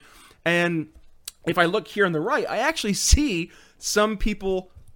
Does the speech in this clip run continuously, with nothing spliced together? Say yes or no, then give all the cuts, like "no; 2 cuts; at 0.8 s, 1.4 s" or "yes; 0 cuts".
yes; 0 cuts